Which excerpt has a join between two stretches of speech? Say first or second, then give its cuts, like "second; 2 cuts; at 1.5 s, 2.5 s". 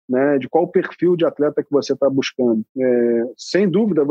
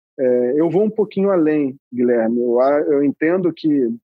first; 1 cut; at 2.7 s